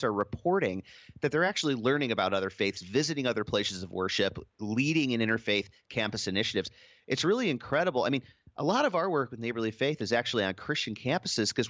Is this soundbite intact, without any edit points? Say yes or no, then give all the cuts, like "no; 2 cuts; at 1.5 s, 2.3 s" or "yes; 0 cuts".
yes; 0 cuts